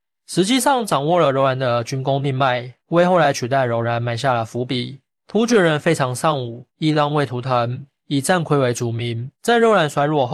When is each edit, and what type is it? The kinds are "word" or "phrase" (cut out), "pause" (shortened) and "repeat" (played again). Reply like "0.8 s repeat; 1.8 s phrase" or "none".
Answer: 2.8 s pause; 6.7 s pause; 9.3 s pause